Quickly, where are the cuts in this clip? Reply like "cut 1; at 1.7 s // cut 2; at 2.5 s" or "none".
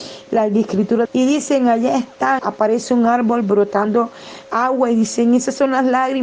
cut 1; at 1.0 s // cut 2; at 2.4 s